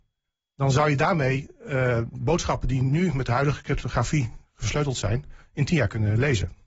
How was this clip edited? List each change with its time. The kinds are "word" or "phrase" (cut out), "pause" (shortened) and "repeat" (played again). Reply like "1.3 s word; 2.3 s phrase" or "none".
none